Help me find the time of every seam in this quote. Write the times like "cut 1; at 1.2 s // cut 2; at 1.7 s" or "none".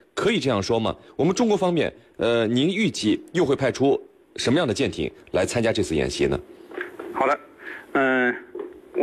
none